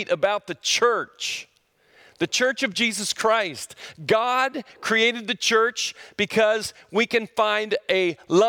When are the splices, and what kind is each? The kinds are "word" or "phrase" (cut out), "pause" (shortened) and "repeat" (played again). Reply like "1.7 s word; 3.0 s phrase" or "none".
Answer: none

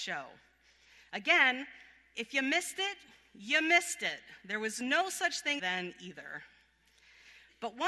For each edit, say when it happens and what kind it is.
5.6 s phrase

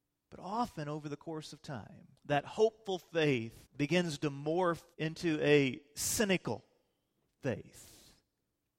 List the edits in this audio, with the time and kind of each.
2.2 s pause; 3.6 s pause; 4.9 s pause

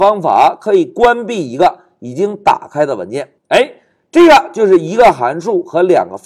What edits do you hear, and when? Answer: 3.4 s pause

